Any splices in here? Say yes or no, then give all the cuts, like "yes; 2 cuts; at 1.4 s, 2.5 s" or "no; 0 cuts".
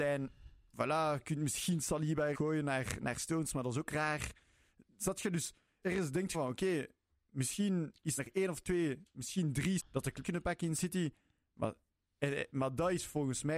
yes; 6 cuts; at 2.3 s, 5.8 s, 6.3 s, 8.2 s, 9.8 s, 10.2 s